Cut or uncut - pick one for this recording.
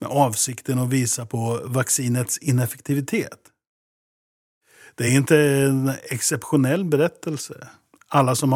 uncut